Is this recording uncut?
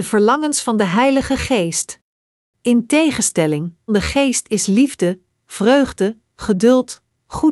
no; 2 cuts; at 2.4 s, 3.9 s

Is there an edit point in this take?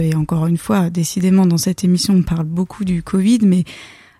no; 0 cuts

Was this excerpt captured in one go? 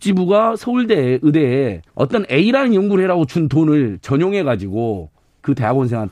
no; 1 cut; at 1.9 s

